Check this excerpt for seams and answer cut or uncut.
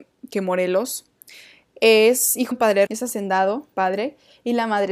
cut